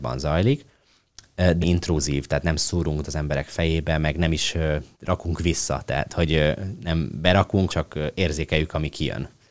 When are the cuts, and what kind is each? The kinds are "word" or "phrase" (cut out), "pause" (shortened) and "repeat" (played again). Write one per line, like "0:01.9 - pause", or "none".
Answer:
0:01.6 - word
0:03.0 - word
0:04.9 - pause
0:07.7 - word